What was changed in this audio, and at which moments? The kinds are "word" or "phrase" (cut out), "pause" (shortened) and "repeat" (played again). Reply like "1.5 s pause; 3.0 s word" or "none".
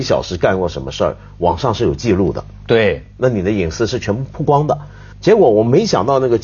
5.1 s pause